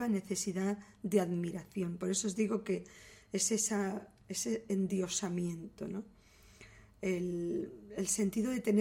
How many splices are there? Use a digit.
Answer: 0